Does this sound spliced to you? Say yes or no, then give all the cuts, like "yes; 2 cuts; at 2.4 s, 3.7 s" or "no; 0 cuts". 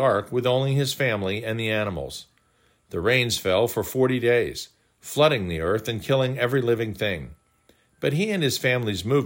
no; 0 cuts